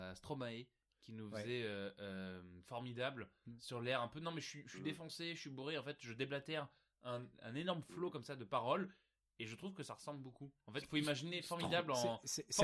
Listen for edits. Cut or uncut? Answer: uncut